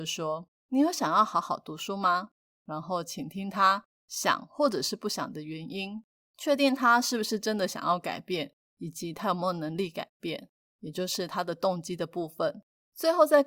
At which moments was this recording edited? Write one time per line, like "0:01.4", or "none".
none